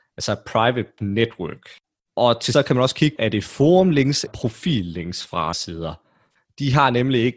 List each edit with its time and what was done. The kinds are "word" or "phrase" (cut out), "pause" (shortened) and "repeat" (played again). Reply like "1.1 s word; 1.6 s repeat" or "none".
1.0 s word; 2.5 s word; 3.2 s word; 4.3 s word; 5.5 s word